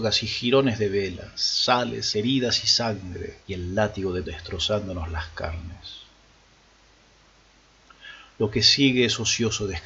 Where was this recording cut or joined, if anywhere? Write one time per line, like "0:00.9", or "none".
0:02.1
0:03.4
0:04.2